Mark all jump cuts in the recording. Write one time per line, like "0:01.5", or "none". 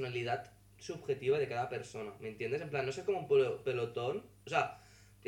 none